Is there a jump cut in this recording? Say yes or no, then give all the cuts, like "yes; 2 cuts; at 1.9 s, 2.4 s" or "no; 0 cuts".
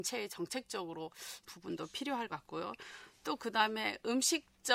yes; 2 cuts; at 1.5 s, 2.3 s